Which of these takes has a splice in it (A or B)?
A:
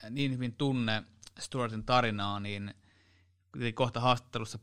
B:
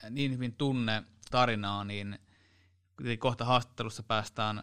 B